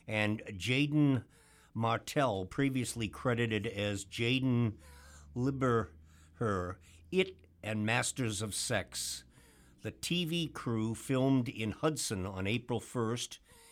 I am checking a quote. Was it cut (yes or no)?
no